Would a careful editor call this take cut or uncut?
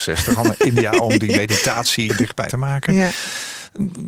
cut